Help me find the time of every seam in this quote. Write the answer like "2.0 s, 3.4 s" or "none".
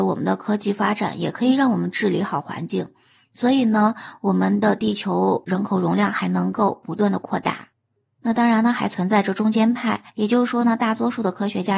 10.1 s

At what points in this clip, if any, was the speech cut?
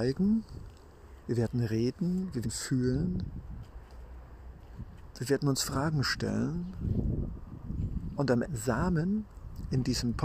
1.2 s, 2.4 s, 8.4 s

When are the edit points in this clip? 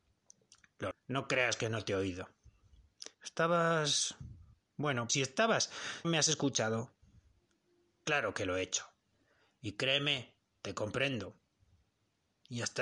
0.9 s, 5.1 s, 6.0 s

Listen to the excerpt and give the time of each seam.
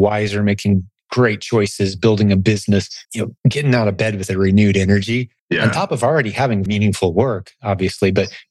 3.0 s, 3.4 s, 5.4 s, 6.7 s

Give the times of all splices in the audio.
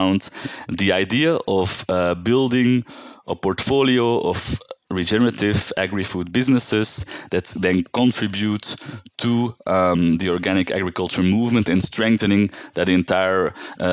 none

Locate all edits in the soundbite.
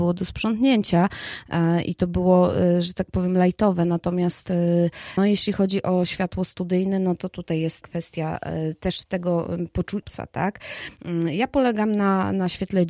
5.2 s, 7.8 s, 10.0 s

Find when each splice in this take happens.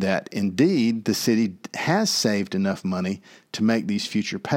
none

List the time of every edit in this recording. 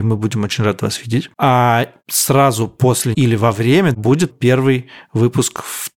3.1 s, 3.9 s, 4.3 s

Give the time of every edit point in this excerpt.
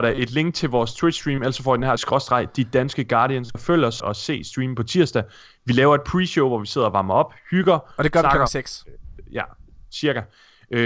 2.0 s, 3.5 s, 4.0 s

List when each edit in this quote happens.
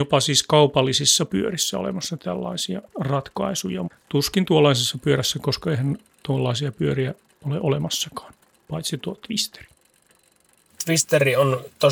none

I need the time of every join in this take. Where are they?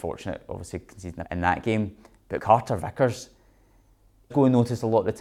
1.3 s, 2.4 s, 4.3 s

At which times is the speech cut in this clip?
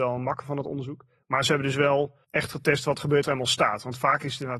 2.2 s, 3.2 s

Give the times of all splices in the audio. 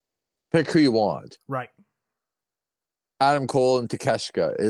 none

